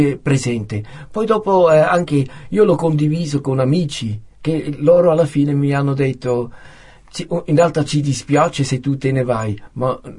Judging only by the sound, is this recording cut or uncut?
cut